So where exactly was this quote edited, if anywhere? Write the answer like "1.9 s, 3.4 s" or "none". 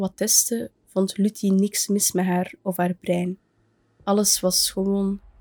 none